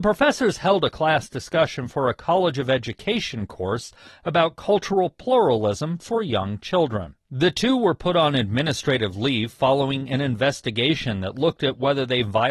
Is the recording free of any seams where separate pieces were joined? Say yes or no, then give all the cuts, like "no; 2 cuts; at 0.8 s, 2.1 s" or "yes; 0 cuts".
yes; 0 cuts